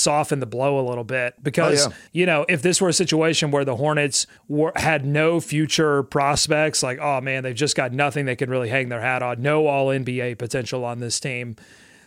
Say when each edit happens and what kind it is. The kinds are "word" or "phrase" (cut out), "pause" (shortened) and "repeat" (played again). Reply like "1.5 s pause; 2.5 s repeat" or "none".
2.1 s pause; 4.4 s pause